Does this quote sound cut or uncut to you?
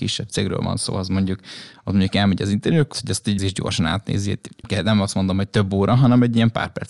cut